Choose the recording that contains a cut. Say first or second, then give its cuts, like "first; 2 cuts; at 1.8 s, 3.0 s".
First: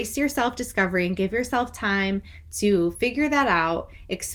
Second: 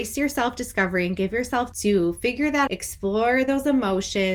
second; 2 cuts; at 1.7 s, 2.7 s